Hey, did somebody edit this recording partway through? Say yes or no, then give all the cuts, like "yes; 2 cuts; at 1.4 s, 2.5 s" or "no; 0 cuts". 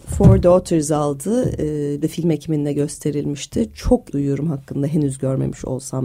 yes; 2 cuts; at 2.0 s, 4.1 s